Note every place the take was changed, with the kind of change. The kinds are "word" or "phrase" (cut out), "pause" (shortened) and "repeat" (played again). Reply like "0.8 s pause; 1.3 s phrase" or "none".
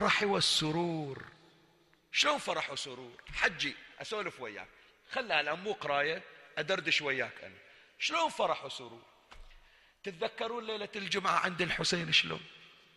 none